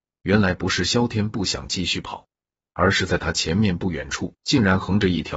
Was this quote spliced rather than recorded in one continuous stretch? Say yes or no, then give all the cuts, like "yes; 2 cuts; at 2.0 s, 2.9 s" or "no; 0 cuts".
yes; 1 cut; at 4.4 s